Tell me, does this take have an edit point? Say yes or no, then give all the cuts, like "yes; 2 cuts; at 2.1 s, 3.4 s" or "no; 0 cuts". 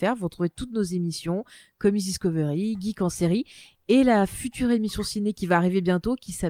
no; 0 cuts